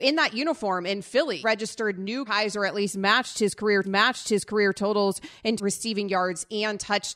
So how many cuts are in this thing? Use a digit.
4